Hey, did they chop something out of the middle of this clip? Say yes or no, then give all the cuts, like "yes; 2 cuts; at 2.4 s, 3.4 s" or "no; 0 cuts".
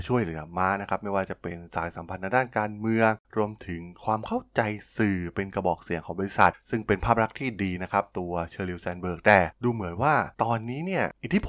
yes; 2 cuts; at 3.2 s, 10.3 s